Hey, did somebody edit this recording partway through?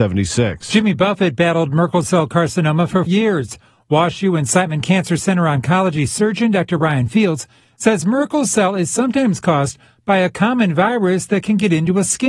yes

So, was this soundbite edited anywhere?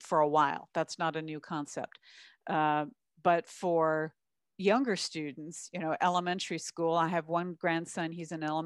no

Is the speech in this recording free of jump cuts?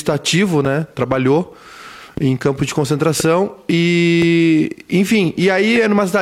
yes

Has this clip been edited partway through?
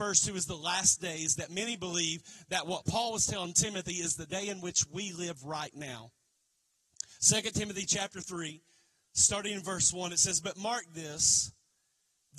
no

